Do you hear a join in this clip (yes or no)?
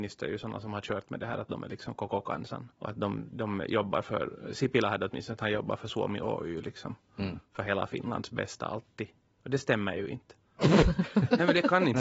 yes